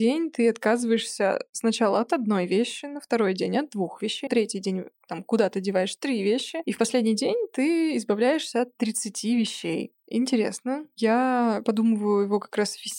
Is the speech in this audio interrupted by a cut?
yes; 1 cut; at 4.3 s

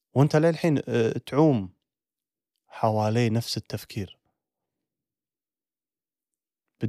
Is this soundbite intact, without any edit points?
yes; 0 cuts

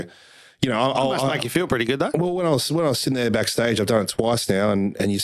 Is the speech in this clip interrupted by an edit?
no; 0 cuts

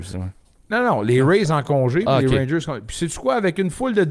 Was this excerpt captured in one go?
yes; 0 cuts

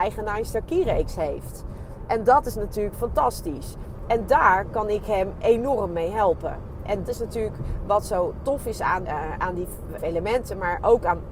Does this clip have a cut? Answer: yes; 4 cuts; at 7.0 s, 9.0 s, 9.4 s, 10.0 s

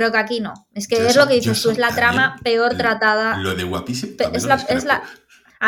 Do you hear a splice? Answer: no; 0 cuts

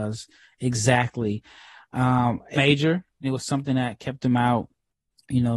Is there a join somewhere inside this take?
yes; 2 cuts; at 2.6 s, 3.2 s

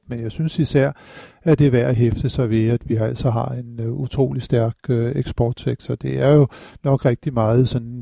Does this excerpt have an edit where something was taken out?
no; 0 cuts

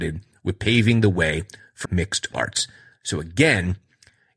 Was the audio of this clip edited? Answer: yes; 2 cuts; at 1.8 s, 2.3 s

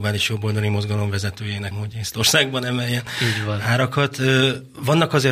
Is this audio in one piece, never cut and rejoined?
no; 1 cut; at 1.7 s

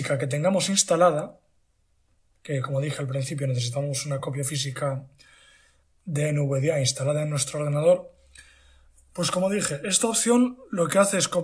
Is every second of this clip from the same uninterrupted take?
yes; 0 cuts

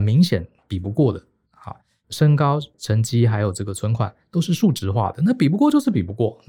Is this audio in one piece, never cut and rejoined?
yes; 0 cuts

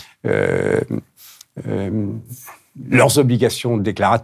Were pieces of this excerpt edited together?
no; 0 cuts

